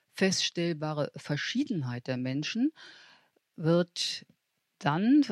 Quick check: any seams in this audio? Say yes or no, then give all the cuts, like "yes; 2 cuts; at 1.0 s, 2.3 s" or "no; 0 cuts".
no; 0 cuts